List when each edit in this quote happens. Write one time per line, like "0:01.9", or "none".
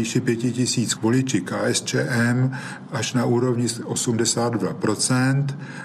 0:01.0

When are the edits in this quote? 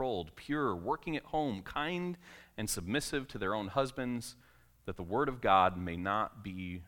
none

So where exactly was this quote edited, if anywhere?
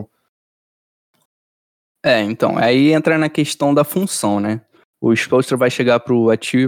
none

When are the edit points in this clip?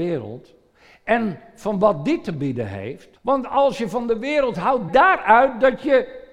0:03.2
0:04.9

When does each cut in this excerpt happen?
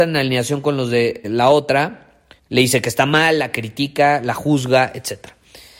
0:01.2
0:02.4

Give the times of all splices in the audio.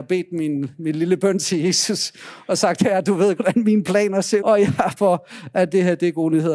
0:03.4
0:04.4
0:05.0

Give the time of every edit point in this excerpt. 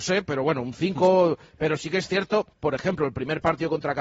0:02.5

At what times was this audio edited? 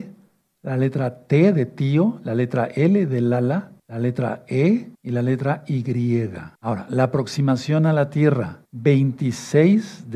0:03.8
0:04.9
0:06.6
0:08.7

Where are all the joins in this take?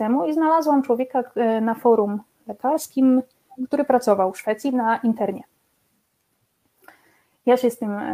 none

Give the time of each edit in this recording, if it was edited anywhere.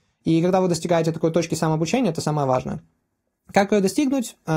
none

